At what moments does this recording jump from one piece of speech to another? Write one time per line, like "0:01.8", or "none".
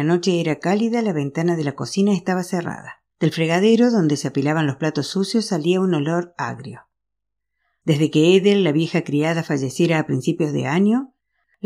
0:03.1